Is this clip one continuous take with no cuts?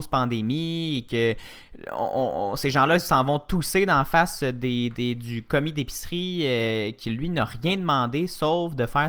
yes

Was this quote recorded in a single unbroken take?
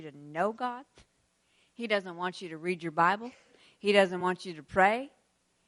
yes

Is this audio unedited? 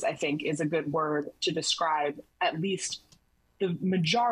yes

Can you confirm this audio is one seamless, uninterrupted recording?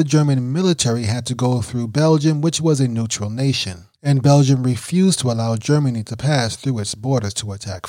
no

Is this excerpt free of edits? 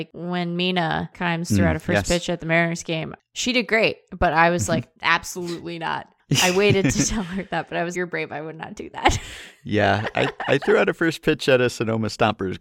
no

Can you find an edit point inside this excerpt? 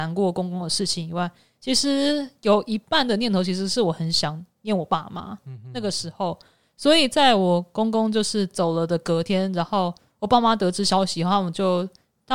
no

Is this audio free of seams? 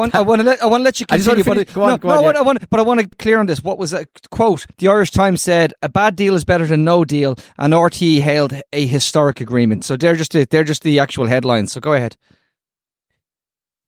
no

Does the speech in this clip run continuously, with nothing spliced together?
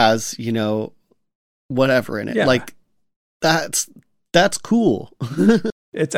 yes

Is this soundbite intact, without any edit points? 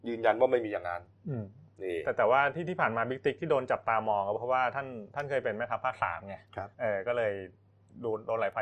no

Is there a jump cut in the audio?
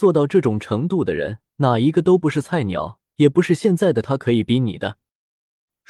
yes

